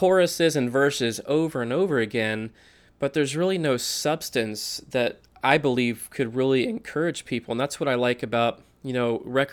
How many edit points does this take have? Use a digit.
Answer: 0